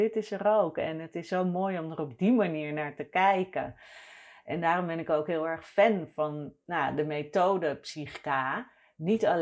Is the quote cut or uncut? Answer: uncut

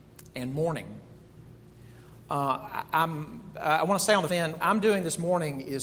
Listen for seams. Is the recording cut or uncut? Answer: cut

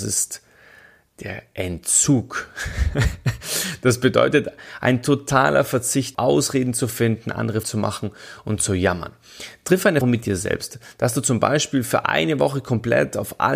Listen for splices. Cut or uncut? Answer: cut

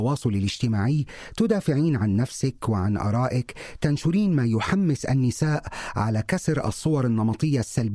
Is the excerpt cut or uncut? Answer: uncut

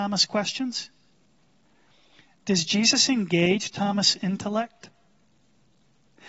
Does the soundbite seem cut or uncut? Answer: uncut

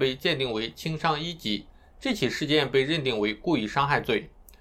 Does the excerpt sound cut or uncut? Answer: uncut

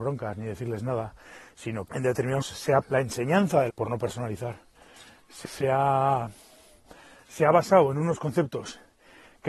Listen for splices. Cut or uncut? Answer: cut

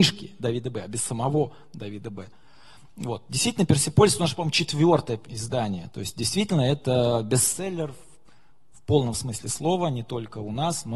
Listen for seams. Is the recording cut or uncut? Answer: uncut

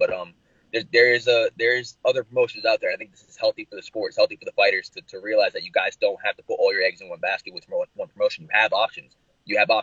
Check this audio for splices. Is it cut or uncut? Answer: cut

